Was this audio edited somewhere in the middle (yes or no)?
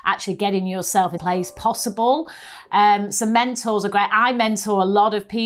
yes